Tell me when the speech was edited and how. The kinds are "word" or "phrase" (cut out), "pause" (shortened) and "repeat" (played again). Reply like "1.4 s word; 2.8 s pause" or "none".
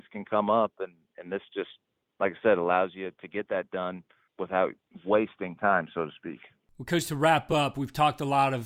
none